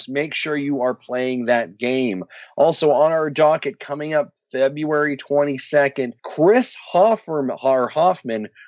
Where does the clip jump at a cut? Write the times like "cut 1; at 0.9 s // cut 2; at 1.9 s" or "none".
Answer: cut 1; at 6.2 s